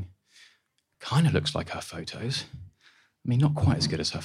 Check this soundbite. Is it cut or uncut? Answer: uncut